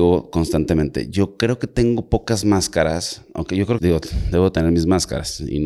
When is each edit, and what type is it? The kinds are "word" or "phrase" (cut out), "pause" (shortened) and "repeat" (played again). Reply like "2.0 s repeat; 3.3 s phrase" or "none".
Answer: 3.8 s word